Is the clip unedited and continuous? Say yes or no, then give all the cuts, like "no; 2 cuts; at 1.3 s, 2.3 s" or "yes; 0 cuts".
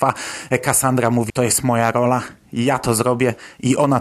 no; 1 cut; at 1.3 s